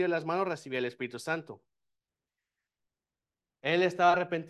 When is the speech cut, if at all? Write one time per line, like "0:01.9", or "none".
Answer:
none

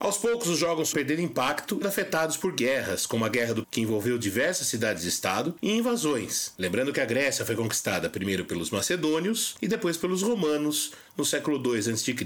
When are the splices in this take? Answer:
0:00.9
0:01.8
0:03.6

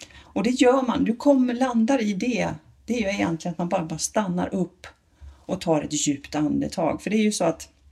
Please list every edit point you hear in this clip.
none

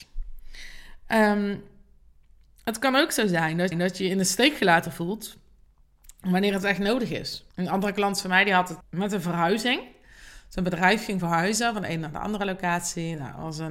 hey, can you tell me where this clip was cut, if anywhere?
0:03.7
0:07.5
0:08.8

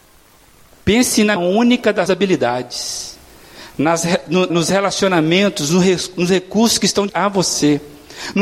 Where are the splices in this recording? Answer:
0:01.4
0:02.1
0:04.5
0:07.1

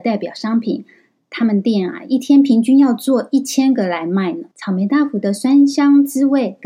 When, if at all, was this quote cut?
0:04.5

